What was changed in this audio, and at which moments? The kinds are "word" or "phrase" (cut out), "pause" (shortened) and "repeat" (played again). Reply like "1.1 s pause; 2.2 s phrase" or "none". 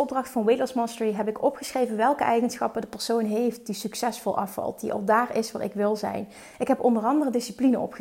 none